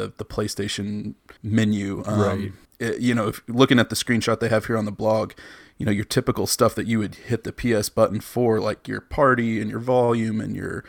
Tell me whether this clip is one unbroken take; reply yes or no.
no